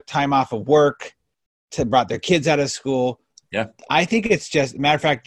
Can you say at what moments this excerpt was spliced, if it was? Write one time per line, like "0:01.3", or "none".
none